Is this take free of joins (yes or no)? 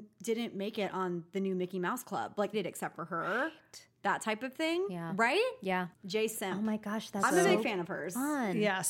no